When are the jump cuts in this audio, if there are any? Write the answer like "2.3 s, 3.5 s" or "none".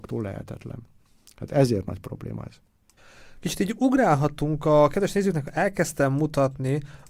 none